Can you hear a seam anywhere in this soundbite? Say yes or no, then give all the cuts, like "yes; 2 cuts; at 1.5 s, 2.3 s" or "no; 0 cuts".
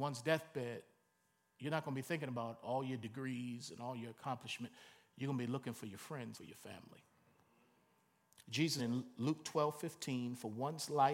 yes; 2 cuts; at 6.3 s, 8.8 s